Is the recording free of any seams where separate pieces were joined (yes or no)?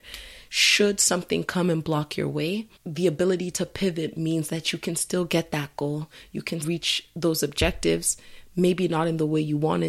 no